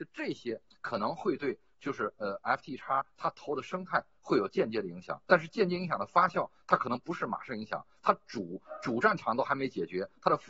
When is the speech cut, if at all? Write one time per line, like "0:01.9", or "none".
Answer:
none